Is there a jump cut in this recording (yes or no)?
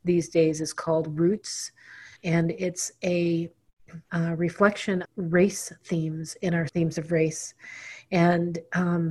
yes